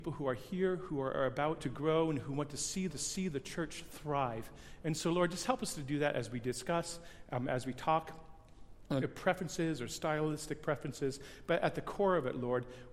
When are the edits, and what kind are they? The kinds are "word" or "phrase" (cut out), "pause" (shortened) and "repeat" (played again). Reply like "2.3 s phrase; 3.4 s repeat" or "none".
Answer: 1.6 s phrase; 2.9 s repeat; 9.0 s phrase